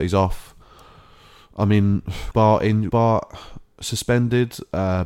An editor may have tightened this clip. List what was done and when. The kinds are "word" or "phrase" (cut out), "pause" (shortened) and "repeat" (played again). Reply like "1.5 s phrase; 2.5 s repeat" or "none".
2.3 s word; 2.9 s word